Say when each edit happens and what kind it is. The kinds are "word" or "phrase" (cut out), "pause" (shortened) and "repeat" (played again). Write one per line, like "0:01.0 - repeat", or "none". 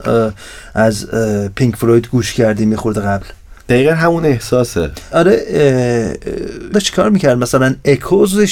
0:03.6 - pause
0:05.1 - word
0:06.7 - phrase